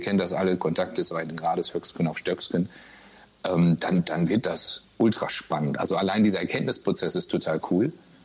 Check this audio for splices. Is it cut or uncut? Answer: uncut